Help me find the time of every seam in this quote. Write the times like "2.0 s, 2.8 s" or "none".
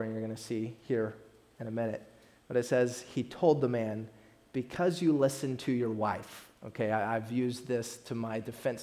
none